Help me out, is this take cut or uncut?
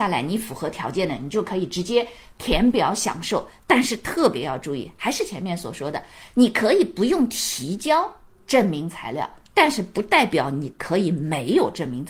uncut